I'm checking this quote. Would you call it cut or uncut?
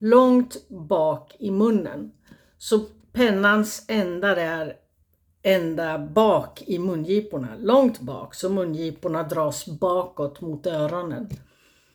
uncut